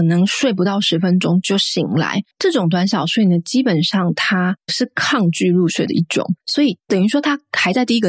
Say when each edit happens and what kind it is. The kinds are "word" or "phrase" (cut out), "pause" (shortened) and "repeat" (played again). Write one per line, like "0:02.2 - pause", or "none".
0:02.3 - pause
0:06.4 - pause